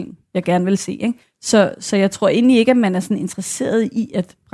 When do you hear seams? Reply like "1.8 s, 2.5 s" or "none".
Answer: 1.2 s